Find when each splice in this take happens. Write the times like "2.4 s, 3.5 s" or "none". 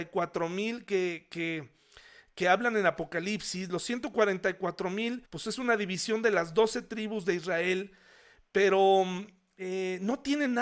5.3 s